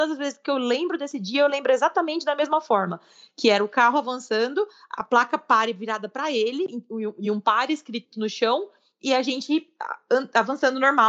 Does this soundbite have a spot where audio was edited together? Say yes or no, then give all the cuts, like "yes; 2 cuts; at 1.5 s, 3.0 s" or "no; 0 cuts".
no; 0 cuts